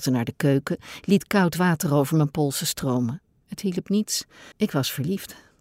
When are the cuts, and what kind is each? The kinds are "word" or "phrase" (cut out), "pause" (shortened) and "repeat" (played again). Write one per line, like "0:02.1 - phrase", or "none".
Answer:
0:03.3 - pause
0:04.5 - pause